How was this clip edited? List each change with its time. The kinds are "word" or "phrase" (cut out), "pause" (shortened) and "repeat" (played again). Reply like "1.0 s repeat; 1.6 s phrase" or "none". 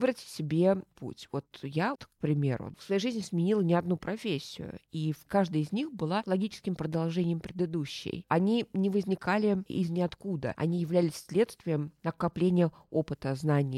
1.9 s word; 5.3 s word